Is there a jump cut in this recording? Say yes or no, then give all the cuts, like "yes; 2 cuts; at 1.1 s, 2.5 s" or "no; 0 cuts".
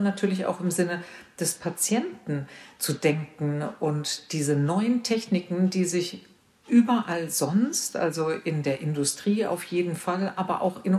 no; 0 cuts